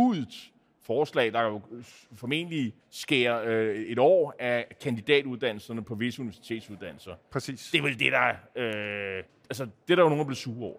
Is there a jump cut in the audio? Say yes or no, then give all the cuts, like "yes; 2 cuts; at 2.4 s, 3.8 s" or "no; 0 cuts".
yes; 2 cuts; at 2.8 s, 9.3 s